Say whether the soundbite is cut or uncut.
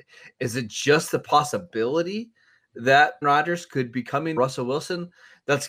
cut